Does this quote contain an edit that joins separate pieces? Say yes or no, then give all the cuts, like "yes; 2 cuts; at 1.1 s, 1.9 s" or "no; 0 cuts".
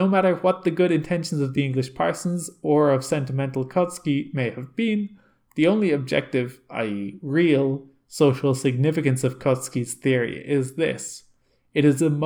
no; 0 cuts